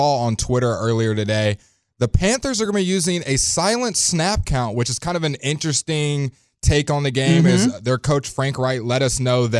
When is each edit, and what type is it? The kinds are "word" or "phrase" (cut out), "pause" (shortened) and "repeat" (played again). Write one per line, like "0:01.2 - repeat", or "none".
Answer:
none

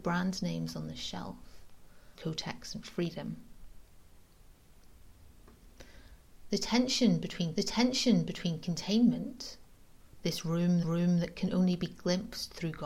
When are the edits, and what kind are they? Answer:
0:02.1 - word
0:07.5 - repeat
0:10.8 - repeat

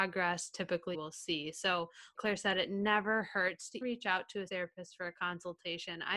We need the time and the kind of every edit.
0:00.9 - word
0:02.2 - word
0:03.8 - word
0:04.5 - word

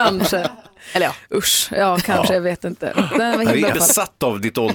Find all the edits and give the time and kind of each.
0:03.7 - word

